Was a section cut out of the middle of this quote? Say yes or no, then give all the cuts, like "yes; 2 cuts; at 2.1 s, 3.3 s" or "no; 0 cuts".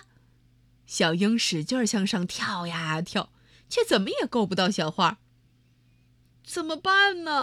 no; 0 cuts